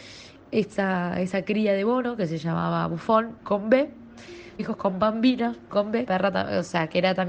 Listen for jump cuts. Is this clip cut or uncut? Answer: cut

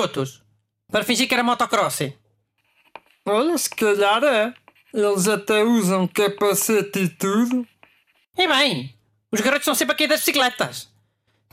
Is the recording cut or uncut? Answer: uncut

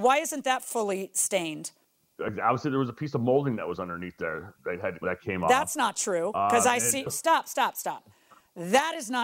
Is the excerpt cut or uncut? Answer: cut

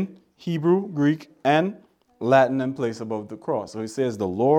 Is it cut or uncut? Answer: uncut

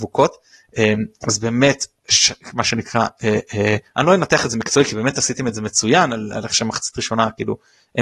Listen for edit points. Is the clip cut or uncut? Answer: uncut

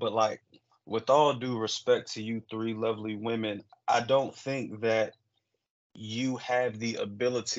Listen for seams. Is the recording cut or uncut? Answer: uncut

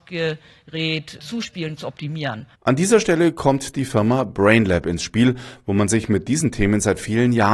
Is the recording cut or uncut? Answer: cut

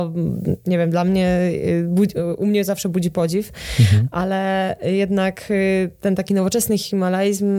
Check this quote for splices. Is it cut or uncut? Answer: uncut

